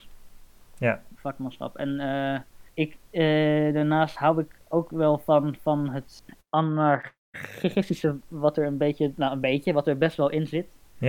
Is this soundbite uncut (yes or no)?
yes